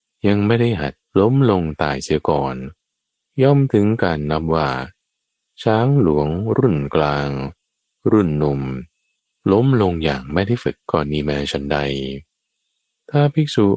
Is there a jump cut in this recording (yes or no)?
yes